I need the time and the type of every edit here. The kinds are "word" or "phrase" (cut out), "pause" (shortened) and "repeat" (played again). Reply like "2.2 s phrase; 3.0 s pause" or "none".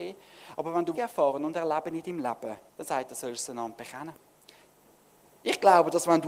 0.9 s phrase; 2.7 s pause